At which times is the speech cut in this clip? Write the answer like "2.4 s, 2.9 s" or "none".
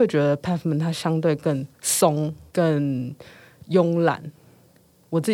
1.7 s